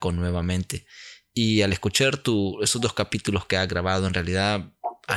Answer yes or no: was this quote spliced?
no